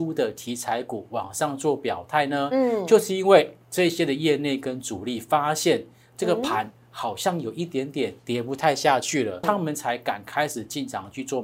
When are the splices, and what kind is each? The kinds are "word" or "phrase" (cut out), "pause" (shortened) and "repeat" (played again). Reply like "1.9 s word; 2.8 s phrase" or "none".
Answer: 3.6 s pause; 8.2 s pause; 9.4 s word